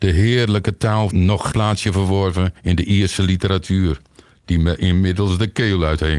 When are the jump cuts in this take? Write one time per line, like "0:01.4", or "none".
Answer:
0:01.1
0:01.5
0:02.6